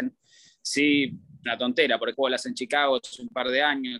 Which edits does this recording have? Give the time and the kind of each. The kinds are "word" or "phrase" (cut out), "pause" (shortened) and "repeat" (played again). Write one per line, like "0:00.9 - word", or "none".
0:01.4 - word
0:02.1 - word
0:02.4 - word

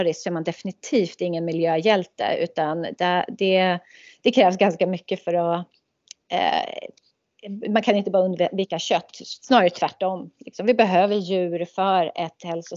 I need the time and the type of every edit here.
none

